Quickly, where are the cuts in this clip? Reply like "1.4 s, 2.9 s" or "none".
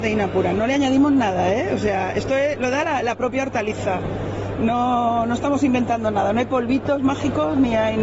none